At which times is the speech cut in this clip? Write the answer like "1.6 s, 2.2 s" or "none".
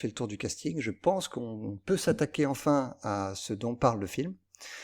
none